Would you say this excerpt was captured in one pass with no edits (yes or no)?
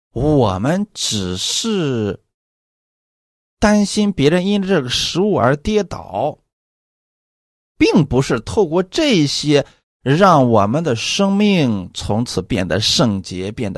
yes